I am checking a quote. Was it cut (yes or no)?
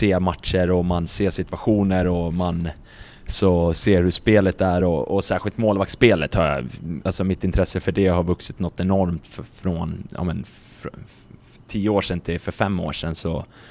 no